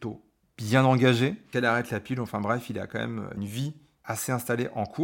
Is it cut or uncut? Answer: uncut